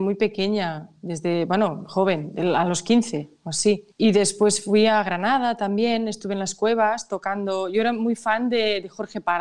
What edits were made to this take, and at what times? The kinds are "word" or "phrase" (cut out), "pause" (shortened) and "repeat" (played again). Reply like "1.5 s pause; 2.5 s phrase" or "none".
3.9 s pause